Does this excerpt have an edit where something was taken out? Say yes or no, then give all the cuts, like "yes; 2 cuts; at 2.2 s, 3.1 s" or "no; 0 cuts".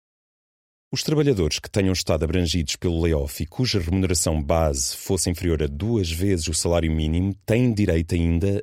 no; 0 cuts